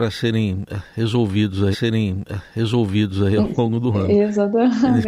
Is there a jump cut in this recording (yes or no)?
yes